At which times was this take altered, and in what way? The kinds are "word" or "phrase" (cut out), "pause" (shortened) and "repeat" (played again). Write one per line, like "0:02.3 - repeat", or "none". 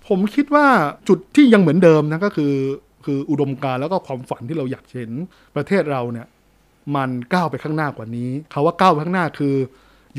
0:01.0 - pause
0:05.3 - pause
0:08.5 - pause